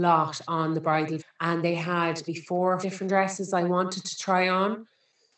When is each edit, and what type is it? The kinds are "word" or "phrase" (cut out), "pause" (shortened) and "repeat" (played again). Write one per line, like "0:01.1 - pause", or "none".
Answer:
0:01.2 - word
0:02.3 - word
0:02.8 - word